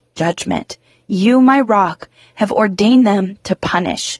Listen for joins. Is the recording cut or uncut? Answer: uncut